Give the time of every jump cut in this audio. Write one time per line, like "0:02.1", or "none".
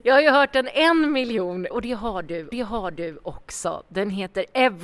0:01.7
0:02.5